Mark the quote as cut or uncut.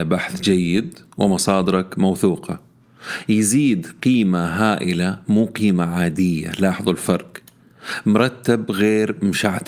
uncut